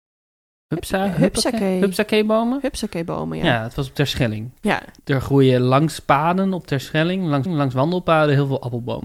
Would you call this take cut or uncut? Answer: cut